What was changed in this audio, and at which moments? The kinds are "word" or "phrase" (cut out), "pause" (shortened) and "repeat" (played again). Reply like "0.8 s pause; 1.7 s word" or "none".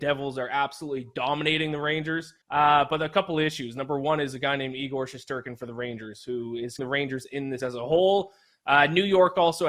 2.4 s pause; 6.8 s word; 7.6 s word